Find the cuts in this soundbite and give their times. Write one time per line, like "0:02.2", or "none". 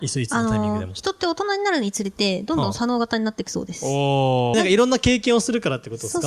0:04.5